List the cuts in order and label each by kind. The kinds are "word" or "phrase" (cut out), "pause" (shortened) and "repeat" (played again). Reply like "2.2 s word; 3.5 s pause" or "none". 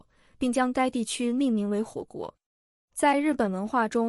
none